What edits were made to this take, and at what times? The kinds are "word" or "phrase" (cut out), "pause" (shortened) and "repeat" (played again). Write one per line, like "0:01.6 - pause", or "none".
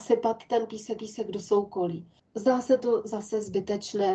0:01.0 - repeat
0:02.2 - pause